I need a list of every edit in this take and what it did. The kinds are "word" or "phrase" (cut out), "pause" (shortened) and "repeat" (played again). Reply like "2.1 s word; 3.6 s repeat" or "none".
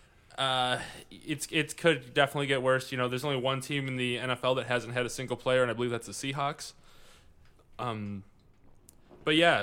none